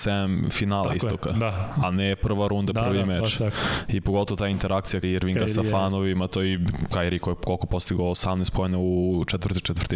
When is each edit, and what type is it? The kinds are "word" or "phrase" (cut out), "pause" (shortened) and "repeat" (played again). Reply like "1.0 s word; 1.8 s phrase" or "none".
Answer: 5.0 s word